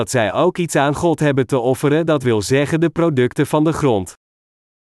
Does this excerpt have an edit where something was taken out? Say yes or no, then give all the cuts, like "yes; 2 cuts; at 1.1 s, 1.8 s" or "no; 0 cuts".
no; 0 cuts